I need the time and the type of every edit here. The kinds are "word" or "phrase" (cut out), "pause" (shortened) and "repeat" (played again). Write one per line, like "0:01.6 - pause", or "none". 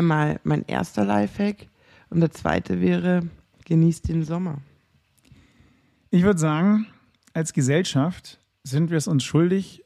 none